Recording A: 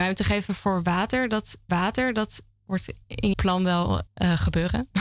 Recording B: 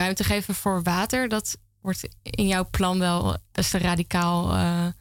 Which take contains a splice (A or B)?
A